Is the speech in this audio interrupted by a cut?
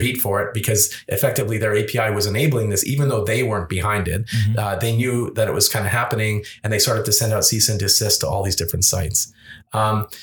no; 0 cuts

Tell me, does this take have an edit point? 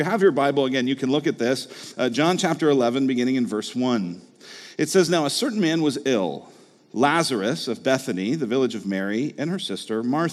no; 0 cuts

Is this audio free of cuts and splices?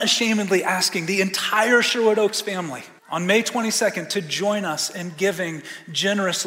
no; 1 cut; at 3.0 s

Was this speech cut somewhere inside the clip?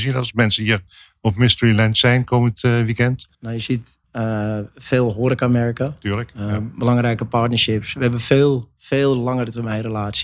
yes; 2 cuts; at 3.3 s, 4.0 s

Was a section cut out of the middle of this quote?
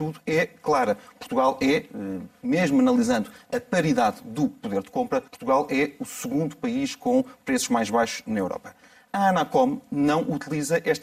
yes; 1 cut; at 5.3 s

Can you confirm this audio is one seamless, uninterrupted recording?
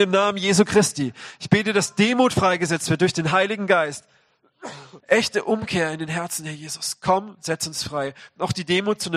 no; 1 cut; at 5.0 s

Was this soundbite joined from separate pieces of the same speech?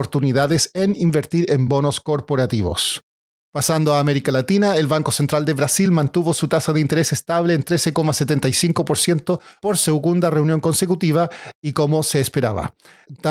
no; 0 cuts

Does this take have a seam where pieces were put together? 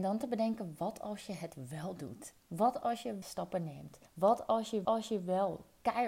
yes; 4 cuts; at 2.4 s, 3.2 s, 4.1 s, 4.8 s

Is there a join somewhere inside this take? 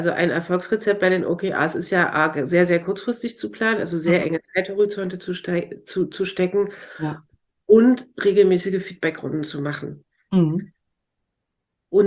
no; 0 cuts

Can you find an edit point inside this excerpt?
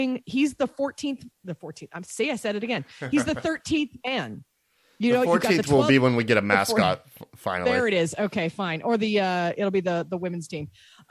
no; 0 cuts

